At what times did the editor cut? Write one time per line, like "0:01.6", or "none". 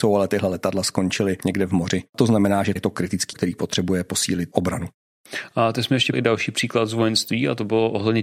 0:02.8
0:03.3
0:06.1

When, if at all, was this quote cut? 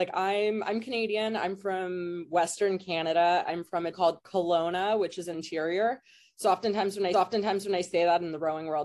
0:03.9
0:05.3
0:07.1

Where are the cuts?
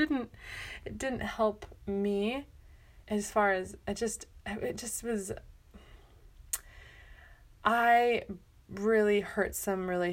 0:03.0

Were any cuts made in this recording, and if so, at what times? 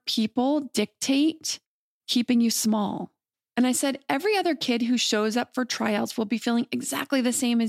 none

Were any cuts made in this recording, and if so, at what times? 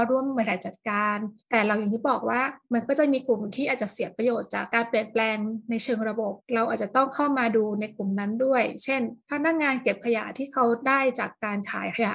0:01.4
0:02.6
0:06.4
0:09.2

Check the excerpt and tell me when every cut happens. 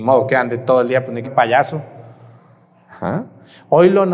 0:01.2

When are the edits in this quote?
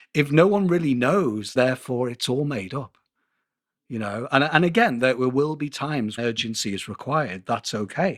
0:01.6
0:06.2

